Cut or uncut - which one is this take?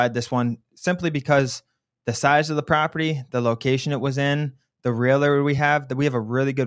uncut